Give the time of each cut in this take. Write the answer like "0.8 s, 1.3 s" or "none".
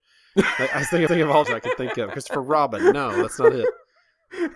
1.1 s, 1.4 s